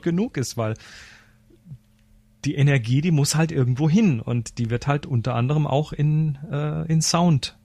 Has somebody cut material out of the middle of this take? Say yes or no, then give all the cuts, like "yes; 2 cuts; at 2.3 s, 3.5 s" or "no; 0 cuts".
no; 0 cuts